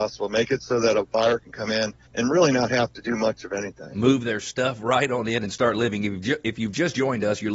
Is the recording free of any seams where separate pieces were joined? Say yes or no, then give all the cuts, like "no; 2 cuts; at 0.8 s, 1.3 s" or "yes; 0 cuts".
no; 1 cut; at 2.1 s